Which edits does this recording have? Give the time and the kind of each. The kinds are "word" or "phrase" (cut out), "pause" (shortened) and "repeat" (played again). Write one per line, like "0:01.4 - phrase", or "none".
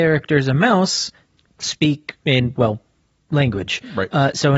0:01.5 - word
0:03.3 - phrase